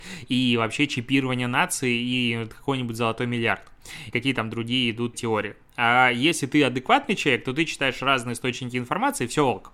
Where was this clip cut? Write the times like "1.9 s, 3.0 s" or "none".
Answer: 4.1 s, 5.1 s